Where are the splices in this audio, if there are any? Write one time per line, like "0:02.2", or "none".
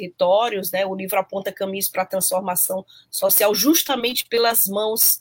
none